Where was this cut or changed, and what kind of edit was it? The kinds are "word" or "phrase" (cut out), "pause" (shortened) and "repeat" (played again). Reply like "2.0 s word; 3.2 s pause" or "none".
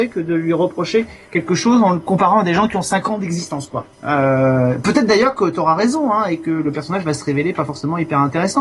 3.9 s pause